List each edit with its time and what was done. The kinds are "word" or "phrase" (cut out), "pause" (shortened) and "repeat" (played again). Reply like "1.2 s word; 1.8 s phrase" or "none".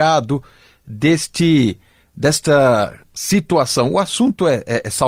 none